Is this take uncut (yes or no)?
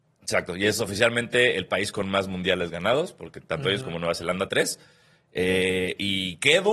no